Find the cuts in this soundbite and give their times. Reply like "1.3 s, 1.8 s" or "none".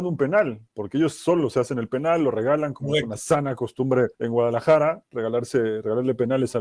4.1 s